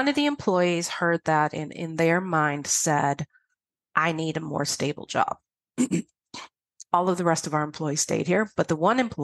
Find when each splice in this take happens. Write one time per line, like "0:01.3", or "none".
none